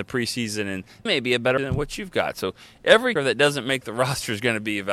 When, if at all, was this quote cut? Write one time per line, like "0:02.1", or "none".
0:01.1
0:01.6
0:03.2